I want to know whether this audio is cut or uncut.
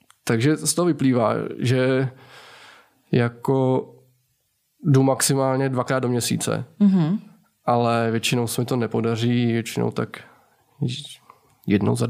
uncut